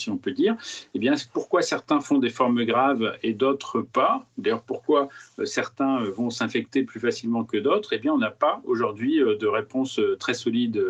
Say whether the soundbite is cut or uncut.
uncut